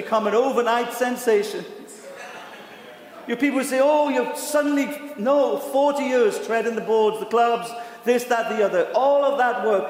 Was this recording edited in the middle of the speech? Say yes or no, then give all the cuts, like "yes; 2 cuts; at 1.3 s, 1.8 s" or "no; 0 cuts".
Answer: no; 0 cuts